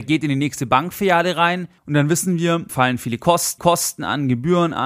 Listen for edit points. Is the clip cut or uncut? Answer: cut